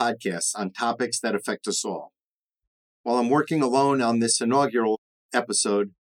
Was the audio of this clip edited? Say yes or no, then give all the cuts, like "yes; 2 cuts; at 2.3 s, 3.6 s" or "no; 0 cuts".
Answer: no; 0 cuts